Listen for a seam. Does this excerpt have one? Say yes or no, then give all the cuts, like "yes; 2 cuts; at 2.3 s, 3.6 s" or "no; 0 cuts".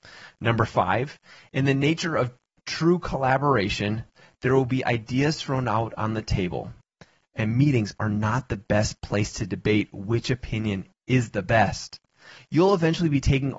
no; 0 cuts